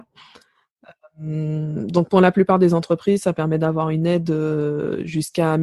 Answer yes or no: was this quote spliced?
no